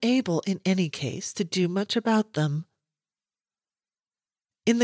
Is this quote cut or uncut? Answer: uncut